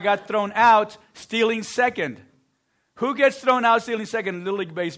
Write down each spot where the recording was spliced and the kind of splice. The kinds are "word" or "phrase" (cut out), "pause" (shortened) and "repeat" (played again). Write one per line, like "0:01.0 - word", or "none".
none